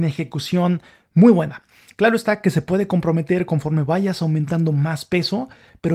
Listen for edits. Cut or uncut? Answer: uncut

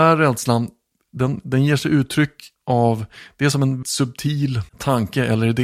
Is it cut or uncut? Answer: cut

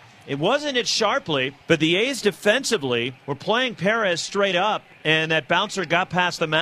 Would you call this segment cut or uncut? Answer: cut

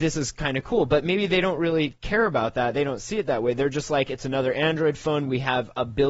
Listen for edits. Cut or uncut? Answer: uncut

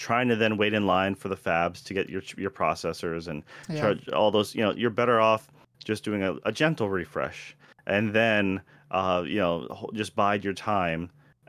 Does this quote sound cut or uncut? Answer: uncut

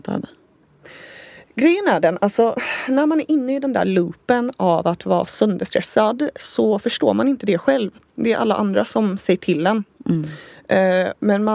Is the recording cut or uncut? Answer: uncut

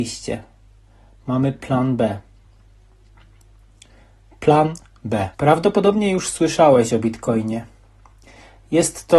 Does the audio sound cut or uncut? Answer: cut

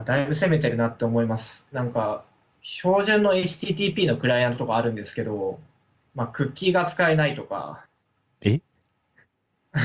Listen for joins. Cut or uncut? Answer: uncut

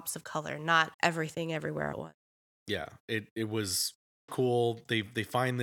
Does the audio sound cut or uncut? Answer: cut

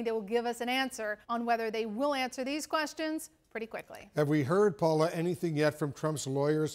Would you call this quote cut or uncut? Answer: cut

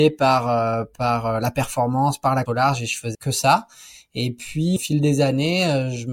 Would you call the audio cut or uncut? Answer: cut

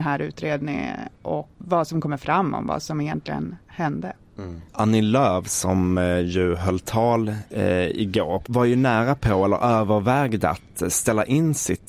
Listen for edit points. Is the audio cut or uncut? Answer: cut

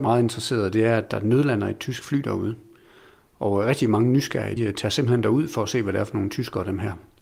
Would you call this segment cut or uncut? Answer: cut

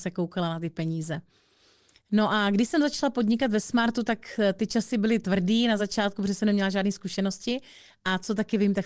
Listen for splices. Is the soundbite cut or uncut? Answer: uncut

